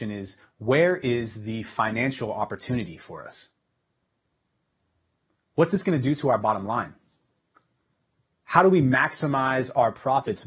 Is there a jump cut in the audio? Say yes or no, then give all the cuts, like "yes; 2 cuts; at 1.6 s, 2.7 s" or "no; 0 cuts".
no; 0 cuts